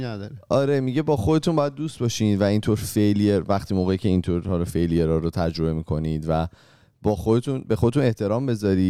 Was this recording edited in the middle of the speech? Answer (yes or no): no